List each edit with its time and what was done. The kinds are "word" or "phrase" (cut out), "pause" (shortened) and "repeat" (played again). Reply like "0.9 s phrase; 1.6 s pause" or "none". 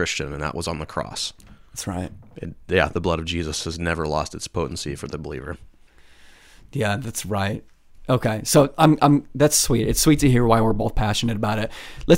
none